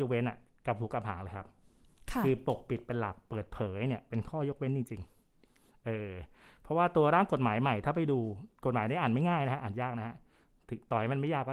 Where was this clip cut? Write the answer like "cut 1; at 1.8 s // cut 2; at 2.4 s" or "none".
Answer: none